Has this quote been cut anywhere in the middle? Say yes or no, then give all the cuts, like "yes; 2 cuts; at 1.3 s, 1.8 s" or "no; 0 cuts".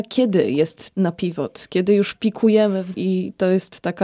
yes; 2 cuts; at 0.9 s, 2.9 s